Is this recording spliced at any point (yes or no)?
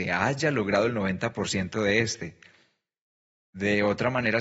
no